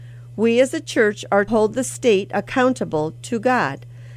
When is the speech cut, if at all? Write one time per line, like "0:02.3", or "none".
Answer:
0:01.5

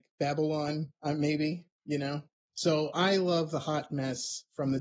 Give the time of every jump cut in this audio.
none

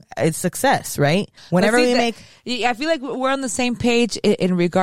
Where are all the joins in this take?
0:01.4

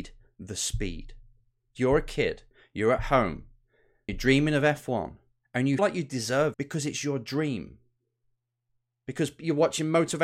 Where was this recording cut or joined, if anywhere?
0:01.8
0:04.1
0:05.8
0:06.5

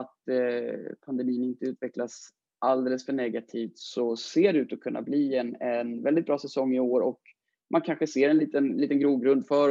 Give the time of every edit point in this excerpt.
none

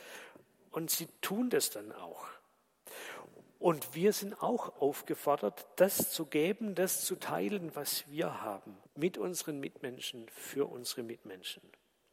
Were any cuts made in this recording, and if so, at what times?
0:08.9

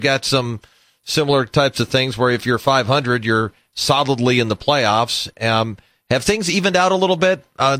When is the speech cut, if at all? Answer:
none

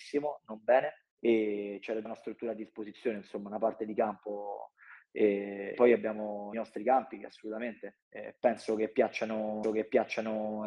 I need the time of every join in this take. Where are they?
0:01.1
0:02.1
0:05.7
0:06.5
0:08.0
0:09.6

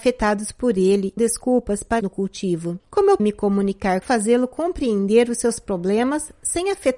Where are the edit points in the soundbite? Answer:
0:01.2
0:02.0
0:02.8
0:03.2
0:04.0

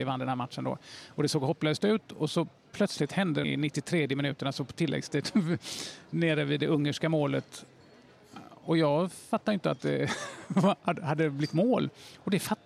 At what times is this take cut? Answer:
0:03.4

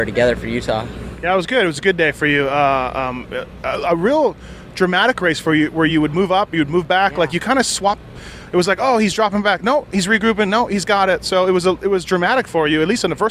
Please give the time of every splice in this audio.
none

